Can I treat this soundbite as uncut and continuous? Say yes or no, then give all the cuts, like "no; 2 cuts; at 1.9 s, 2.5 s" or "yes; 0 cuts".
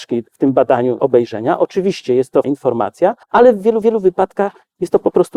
no; 4 cuts; at 1.0 s, 2.4 s, 3.2 s, 3.8 s